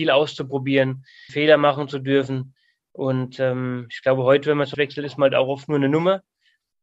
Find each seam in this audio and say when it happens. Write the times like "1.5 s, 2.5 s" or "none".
1.3 s, 4.7 s